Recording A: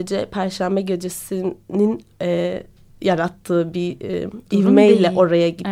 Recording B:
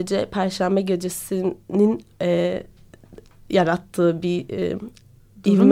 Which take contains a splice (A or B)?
A